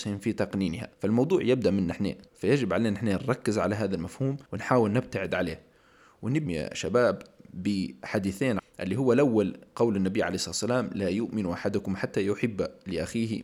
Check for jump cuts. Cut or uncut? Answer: cut